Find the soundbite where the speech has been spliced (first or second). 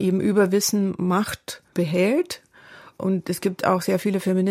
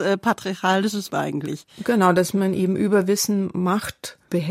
second